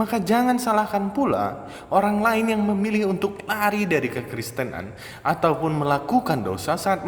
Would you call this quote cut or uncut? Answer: uncut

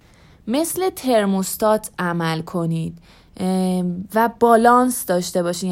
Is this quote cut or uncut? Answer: uncut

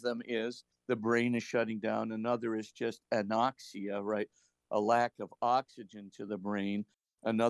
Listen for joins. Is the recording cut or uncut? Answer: uncut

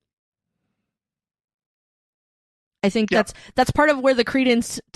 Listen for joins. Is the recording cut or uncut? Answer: uncut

